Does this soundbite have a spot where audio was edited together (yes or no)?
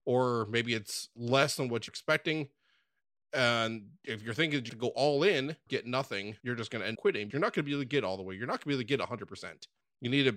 yes